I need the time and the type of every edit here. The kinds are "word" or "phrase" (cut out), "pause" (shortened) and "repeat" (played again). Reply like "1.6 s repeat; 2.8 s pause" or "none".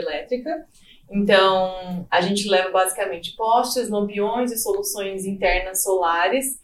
none

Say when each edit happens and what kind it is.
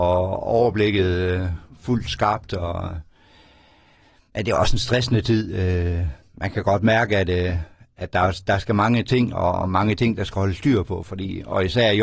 none

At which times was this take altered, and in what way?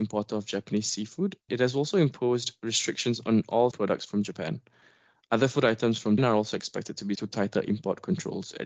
1.5 s word; 3.7 s word; 6.2 s word; 7.1 s word

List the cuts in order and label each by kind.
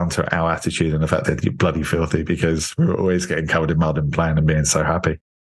1.2 s phrase

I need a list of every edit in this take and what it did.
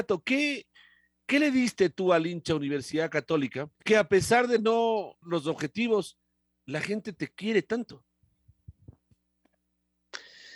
3.7 s pause; 5.2 s word

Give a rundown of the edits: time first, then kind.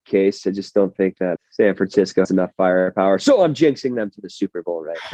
1.4 s word; 2.2 s word

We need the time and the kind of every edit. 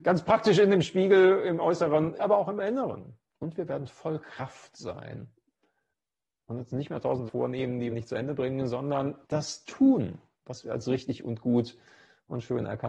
2.2 s word; 3.3 s pause; 5.9 s pause; 7.3 s word; 7.9 s word; 9.2 s pause; 10.3 s pause

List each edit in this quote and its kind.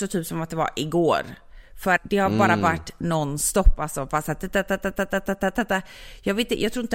2.0 s word

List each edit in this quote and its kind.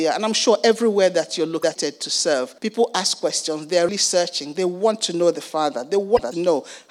2.6 s pause; 3.9 s word

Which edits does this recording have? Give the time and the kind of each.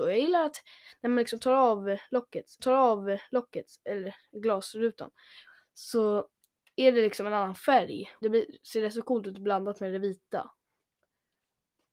2.6 s repeat; 8.2 s phrase

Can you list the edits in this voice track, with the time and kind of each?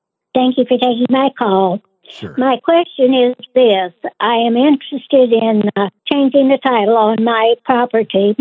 6.0 s pause

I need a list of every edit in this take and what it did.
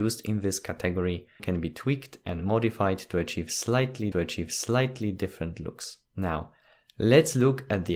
1.4 s phrase; 4.1 s repeat; 6.1 s pause

